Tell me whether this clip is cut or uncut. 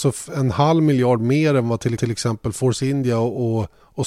cut